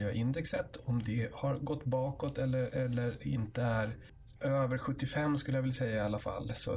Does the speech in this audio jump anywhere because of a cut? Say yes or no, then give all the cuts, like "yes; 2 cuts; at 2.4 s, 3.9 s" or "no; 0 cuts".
no; 0 cuts